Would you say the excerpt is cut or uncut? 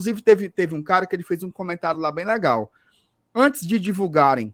uncut